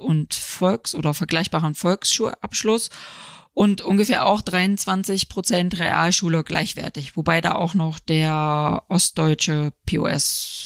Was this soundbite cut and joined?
no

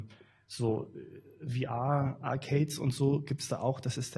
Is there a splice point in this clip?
no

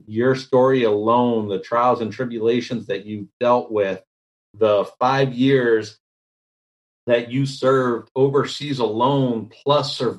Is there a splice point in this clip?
no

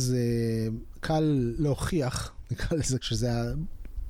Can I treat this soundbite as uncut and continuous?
no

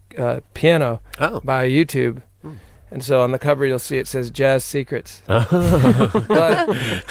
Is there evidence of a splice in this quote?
no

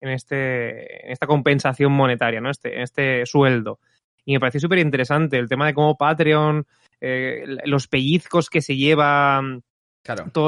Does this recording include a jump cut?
no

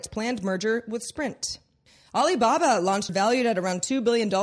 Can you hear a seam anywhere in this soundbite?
yes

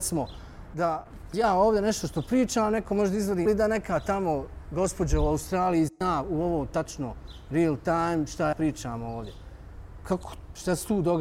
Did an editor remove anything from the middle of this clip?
yes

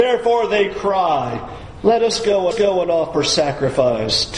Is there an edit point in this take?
yes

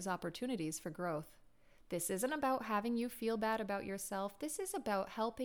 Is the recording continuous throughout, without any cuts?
yes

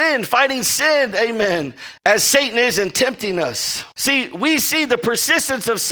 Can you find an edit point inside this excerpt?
yes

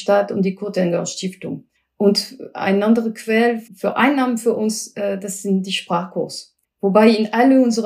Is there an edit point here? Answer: yes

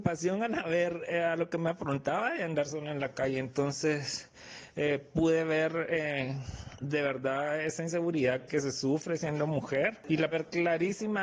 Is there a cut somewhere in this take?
yes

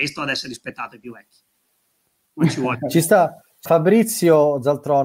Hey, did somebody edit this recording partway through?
yes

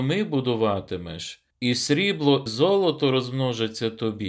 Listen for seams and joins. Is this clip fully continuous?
no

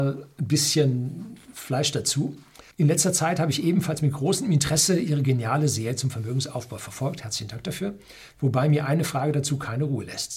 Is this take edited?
yes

